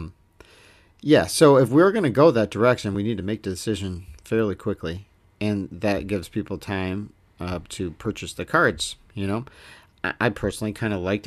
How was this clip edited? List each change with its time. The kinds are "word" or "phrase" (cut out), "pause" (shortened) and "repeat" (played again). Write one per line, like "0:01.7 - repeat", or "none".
none